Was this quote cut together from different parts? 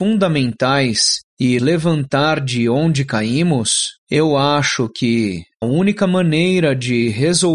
yes; 3 cuts; at 1.6 s, 4.0 s, 5.6 s

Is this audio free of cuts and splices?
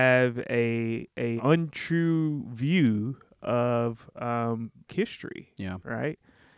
no; 2 cuts; at 1.4 s, 4.9 s

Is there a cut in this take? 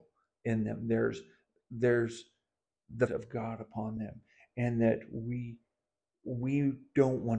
yes; 1 cut; at 3.1 s

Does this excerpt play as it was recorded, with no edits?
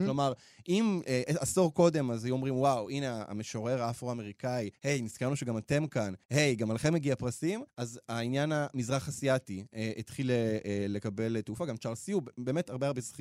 no; 3 cuts; at 4.7 s, 6.2 s, 7.7 s

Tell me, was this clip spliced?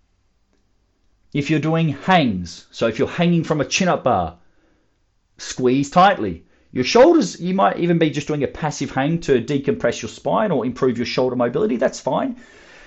no; 0 cuts

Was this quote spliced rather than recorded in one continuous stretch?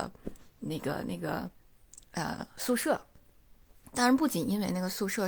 no; 0 cuts

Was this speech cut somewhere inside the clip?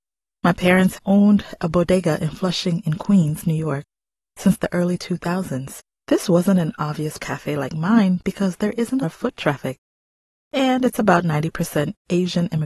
yes; 4 cuts; at 1.0 s, 5.9 s, 7.2 s, 9.0 s

